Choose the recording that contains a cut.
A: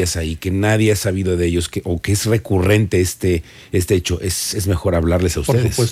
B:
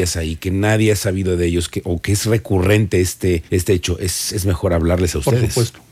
B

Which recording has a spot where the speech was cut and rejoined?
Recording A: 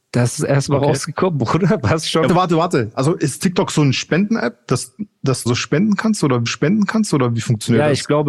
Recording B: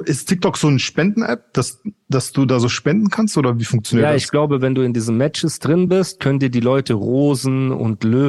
A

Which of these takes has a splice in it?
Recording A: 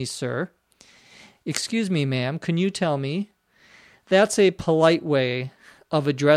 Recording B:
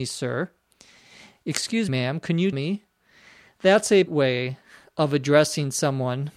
B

